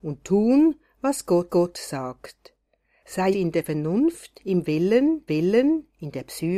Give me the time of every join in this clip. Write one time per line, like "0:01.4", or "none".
0:01.5
0:03.3
0:05.3